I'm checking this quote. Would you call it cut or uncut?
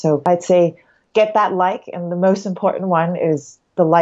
uncut